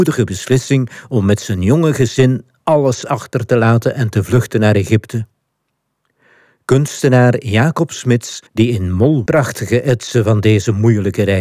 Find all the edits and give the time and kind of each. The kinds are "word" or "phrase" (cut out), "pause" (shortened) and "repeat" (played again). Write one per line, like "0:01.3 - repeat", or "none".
0:08.5 - pause
0:09.3 - phrase